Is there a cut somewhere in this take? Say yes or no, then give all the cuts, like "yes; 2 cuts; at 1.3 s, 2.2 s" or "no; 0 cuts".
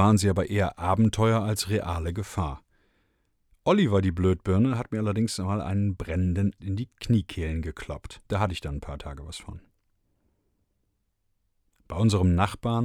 yes; 2 cuts; at 6.6 s, 8.2 s